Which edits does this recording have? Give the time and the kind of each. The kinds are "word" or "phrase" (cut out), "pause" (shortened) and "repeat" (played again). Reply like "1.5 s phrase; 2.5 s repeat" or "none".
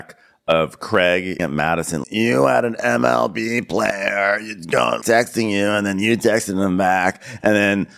1.4 s word; 2.0 s word; 5.0 s word